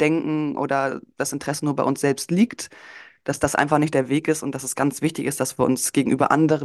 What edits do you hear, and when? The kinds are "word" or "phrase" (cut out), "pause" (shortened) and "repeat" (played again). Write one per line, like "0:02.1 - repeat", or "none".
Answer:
none